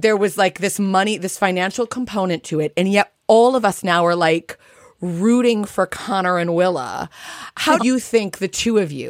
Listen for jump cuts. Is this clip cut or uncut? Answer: cut